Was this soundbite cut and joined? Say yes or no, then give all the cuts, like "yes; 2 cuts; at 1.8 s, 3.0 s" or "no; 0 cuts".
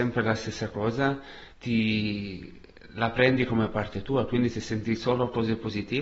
yes; 1 cut; at 1.5 s